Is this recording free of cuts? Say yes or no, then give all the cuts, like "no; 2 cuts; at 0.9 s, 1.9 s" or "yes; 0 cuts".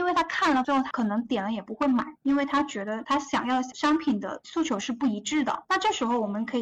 no; 1 cut; at 2.2 s